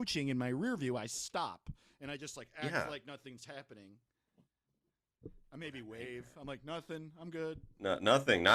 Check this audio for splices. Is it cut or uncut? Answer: uncut